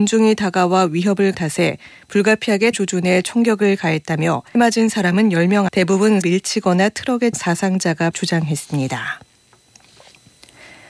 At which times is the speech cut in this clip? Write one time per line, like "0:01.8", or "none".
0:01.3
0:02.7
0:04.5
0:05.7
0:06.2
0:07.3
0:08.1